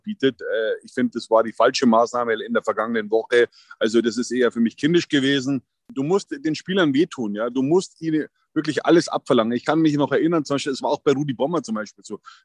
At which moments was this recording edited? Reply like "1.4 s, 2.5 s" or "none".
none